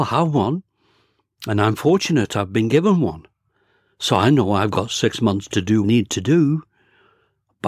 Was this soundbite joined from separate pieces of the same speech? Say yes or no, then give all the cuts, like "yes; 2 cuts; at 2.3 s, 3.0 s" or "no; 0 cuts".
yes; 1 cut; at 5.8 s